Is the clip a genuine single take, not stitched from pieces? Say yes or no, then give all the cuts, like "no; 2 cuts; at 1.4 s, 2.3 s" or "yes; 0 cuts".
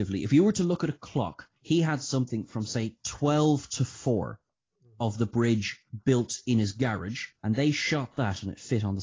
no; 2 cuts; at 1.6 s, 7.3 s